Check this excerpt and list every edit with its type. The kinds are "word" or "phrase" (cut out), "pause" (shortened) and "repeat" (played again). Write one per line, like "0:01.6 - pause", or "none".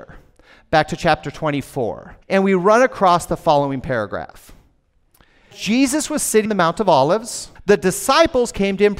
0:02.2 - pause
0:05.5 - word
0:06.5 - word
0:07.6 - pause